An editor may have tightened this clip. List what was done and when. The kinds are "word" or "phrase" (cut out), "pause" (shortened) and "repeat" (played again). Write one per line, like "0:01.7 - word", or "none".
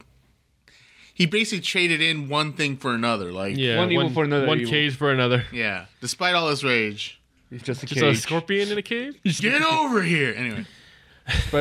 0:05.9 - pause
0:07.6 - word
0:09.4 - word

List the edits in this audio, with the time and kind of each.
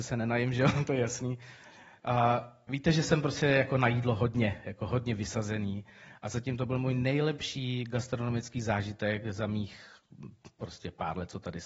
none

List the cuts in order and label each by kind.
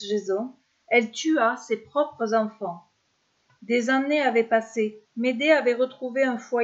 0:05.0 - pause

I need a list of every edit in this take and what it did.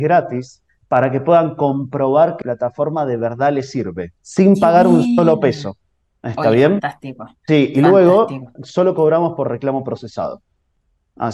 0:02.4 - word
0:04.2 - pause
0:07.4 - pause
0:08.6 - word

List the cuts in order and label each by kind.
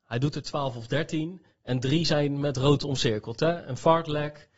none

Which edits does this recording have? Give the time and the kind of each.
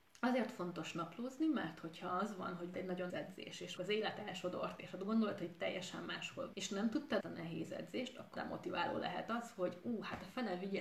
0:02.7 - word
0:03.1 - word
0:03.8 - word
0:06.5 - word
0:07.2 - phrase
0:08.4 - word

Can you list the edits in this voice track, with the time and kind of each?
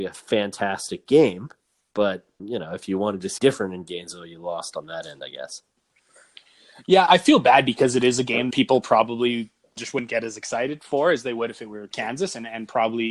0:02.4 - word
0:03.4 - word
0:07.1 - word
0:08.5 - word
0:09.8 - word
0:11.9 - word

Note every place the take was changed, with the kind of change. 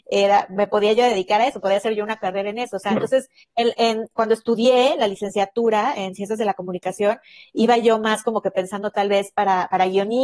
none

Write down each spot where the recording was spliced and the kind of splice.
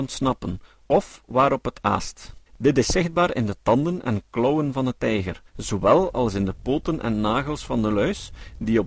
0:02.5 - pause
0:05.5 - pause

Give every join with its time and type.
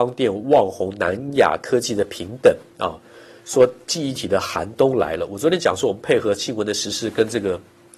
0:02.7 - pause

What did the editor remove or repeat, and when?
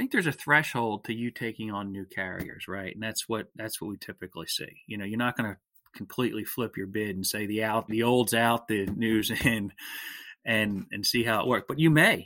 0:07.9 - word

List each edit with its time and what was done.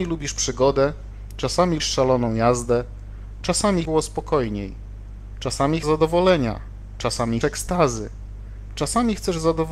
0:01.8 - word
0:03.8 - phrase
0:05.8 - word
0:07.4 - word

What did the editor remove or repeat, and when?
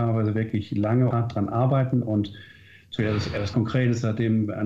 0:01.1 - word
0:03.0 - word
0:03.5 - word

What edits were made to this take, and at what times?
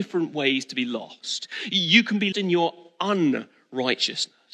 0:02.3 - word

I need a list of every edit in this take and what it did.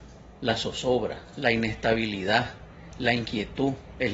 none

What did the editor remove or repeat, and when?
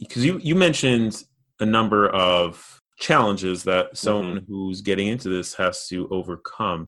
0:02.9 - pause

